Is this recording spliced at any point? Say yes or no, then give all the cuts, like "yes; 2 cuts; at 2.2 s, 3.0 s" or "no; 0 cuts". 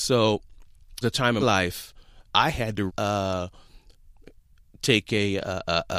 yes; 4 cuts; at 1.0 s, 1.4 s, 2.3 s, 2.9 s